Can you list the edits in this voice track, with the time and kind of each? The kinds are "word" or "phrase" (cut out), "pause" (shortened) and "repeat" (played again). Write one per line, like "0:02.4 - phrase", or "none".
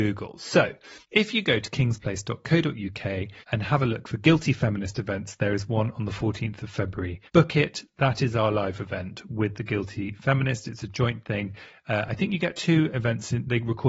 0:01.0 - pause
0:03.4 - pause
0:07.3 - pause